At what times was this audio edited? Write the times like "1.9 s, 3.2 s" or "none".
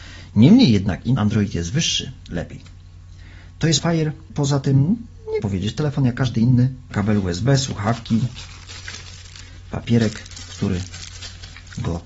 1.2 s, 2.3 s, 3.8 s, 5.4 s, 6.9 s